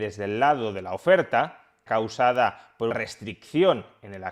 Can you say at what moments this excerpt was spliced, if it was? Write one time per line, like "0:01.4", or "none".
0:01.9
0:02.9